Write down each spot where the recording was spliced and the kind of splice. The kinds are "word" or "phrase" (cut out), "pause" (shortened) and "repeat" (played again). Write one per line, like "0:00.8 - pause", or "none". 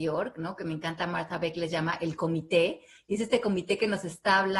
none